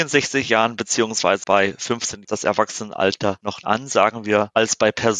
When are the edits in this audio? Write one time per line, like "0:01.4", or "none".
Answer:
0:01.4
0:02.2
0:03.6